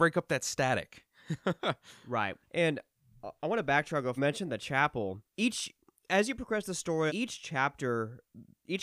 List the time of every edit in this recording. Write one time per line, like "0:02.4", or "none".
0:02.4
0:04.2
0:05.3
0:07.1